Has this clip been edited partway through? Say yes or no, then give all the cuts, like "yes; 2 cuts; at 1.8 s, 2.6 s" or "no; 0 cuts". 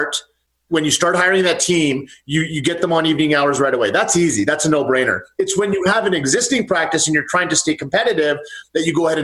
no; 0 cuts